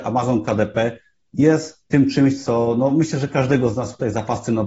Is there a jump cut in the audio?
no; 0 cuts

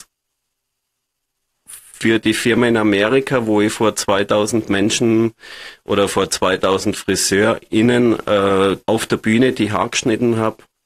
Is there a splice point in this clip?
yes; 1 cut; at 8.8 s

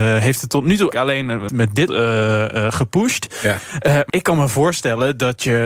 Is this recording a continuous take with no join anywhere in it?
no; 4 cuts; at 0.9 s, 1.5 s, 1.9 s, 4.1 s

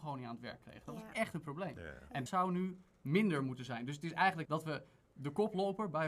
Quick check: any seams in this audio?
yes; 2 cuts; at 2.3 s, 4.4 s

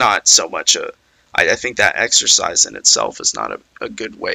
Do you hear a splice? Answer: no; 0 cuts

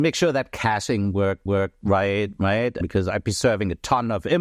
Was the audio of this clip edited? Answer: yes; 1 cut; at 1.5 s

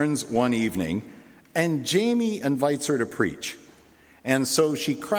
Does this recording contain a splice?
no; 0 cuts

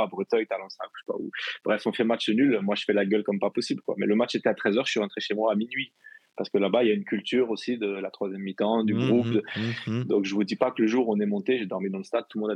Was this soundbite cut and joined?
no; 0 cuts

